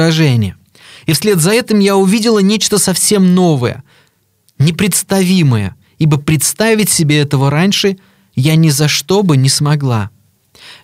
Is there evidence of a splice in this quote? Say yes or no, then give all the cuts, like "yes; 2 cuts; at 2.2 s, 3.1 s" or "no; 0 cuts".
no; 0 cuts